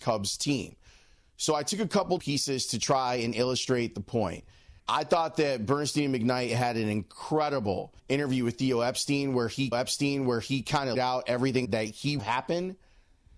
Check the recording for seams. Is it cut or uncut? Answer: cut